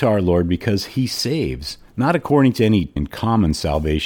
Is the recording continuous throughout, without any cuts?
no; 2 cuts; at 1.9 s, 3.0 s

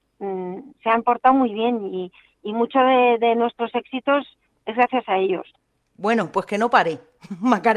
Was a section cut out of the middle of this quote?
no; 0 cuts

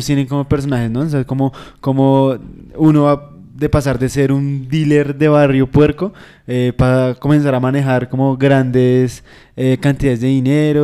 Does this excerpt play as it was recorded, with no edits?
yes; 0 cuts

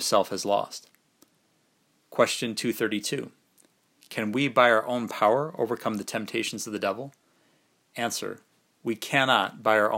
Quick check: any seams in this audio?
no; 0 cuts

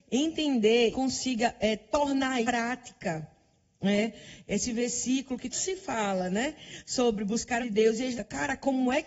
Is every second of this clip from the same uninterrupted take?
no; 5 cuts; at 0.9 s, 2.4 s, 5.5 s, 7.6 s, 8.2 s

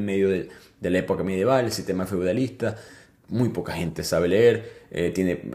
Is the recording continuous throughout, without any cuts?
yes; 0 cuts

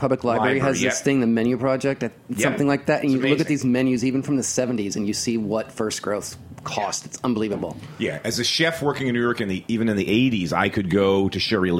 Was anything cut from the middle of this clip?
no; 0 cuts

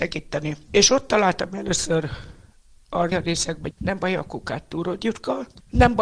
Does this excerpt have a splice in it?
yes; 2 cuts; at 3.1 s, 3.7 s

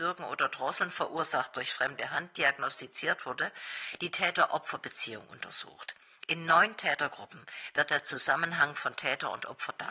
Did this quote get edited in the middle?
no; 0 cuts

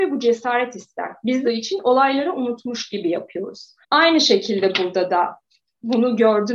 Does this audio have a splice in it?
yes; 2 cuts; at 1.4 s, 3.8 s

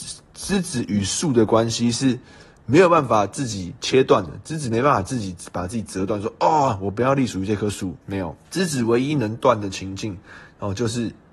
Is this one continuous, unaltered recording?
no; 2 cuts; at 8.0 s, 8.4 s

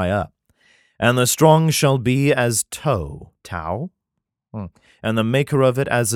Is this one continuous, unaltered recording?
yes; 0 cuts

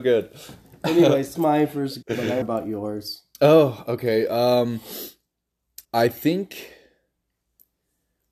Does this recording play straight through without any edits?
no; 4 cuts; at 1.3 s, 2.0 s, 2.4 s, 5.8 s

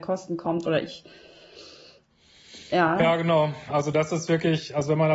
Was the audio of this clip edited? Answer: no; 0 cuts

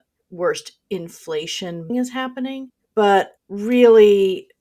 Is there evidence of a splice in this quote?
yes; 2 cuts; at 1.9 s, 3.4 s

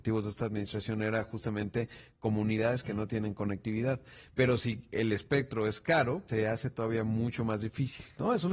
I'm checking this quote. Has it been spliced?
yes; 1 cut; at 6.3 s

